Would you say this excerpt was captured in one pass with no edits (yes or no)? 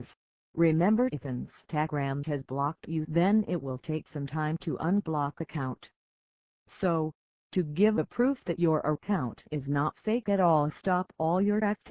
yes